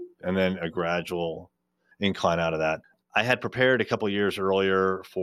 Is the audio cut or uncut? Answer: uncut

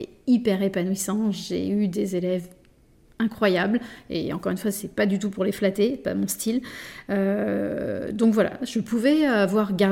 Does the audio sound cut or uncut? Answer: uncut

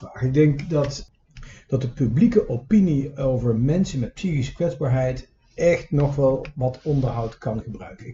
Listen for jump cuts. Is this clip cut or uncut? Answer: uncut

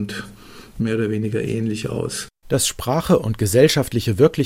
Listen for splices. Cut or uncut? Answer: cut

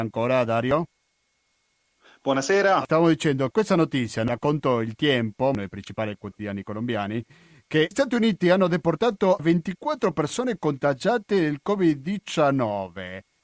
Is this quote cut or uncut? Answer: cut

